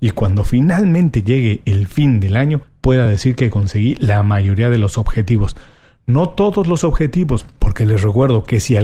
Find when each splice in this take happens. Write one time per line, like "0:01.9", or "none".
none